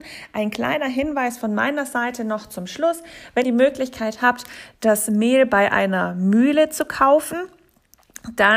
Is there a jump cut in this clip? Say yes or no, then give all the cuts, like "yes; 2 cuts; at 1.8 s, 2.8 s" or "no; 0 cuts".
yes; 1 cut; at 3.4 s